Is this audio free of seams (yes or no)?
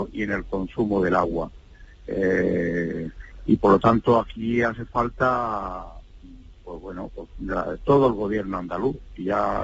yes